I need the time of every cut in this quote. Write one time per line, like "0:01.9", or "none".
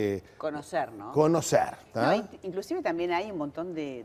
0:01.9